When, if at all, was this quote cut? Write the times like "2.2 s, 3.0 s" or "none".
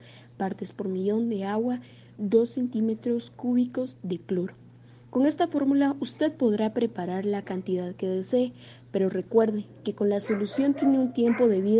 none